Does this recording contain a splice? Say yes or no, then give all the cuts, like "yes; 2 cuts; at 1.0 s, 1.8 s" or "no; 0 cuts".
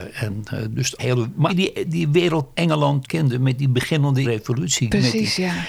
yes; 6 cuts; at 1.0 s, 1.5 s, 1.8 s, 2.5 s, 3.0 s, 4.2 s